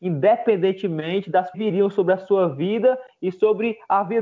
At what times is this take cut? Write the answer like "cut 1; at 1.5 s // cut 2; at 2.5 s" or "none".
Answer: cut 1; at 1.5 s

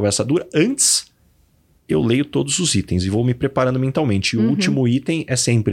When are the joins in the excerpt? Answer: none

